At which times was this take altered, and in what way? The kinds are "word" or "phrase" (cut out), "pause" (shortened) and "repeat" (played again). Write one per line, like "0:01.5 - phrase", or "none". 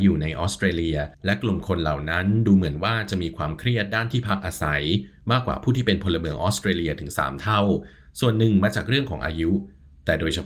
0:01.1 - pause